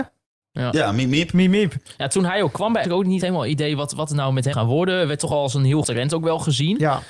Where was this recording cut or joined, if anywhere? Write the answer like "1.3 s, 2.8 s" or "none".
2.8 s, 3.2 s, 4.5 s, 5.8 s